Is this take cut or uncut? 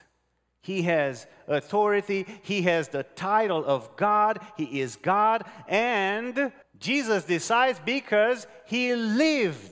cut